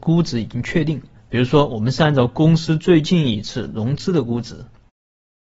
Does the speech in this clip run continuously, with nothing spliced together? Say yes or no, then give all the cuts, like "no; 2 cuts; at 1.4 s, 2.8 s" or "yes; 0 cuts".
no; 1 cut; at 1.1 s